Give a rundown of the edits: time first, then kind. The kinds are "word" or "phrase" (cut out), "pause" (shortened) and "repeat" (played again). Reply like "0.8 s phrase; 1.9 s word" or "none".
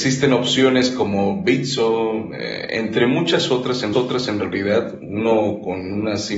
3.9 s repeat